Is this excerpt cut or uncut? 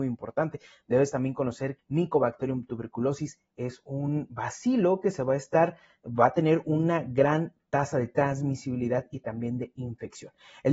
cut